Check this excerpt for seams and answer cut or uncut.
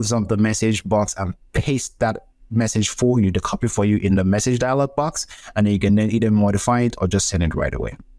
uncut